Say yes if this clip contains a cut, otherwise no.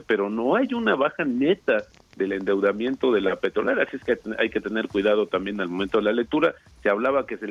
no